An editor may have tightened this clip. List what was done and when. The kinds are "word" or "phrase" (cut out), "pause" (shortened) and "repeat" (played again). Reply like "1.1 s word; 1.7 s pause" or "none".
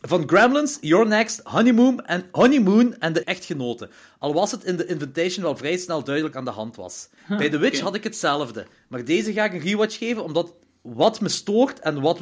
3.2 s phrase; 6.3 s word; 7.2 s pause